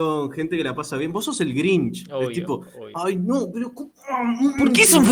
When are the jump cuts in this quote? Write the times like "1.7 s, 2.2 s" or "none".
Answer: none